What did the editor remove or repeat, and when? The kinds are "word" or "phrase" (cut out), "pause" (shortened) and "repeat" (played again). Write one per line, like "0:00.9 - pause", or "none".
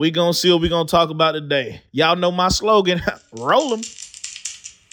0:01.9 - pause